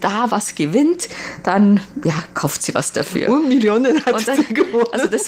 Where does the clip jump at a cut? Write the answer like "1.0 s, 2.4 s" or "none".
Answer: 2.3 s